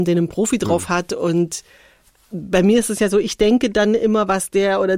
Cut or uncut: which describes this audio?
uncut